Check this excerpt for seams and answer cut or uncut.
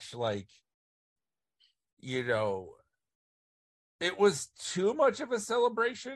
uncut